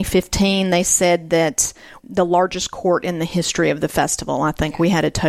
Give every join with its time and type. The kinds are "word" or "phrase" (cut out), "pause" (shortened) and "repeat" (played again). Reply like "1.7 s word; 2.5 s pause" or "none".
2.0 s phrase